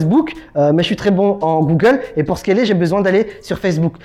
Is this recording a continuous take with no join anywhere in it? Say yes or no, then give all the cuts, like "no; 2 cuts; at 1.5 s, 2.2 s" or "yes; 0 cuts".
yes; 0 cuts